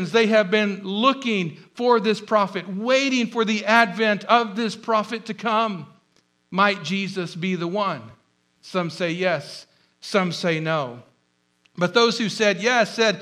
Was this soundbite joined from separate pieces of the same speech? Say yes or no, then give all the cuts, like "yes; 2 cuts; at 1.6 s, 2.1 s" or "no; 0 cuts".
no; 0 cuts